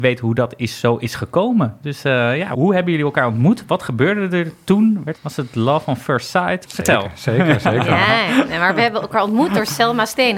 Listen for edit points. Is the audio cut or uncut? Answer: uncut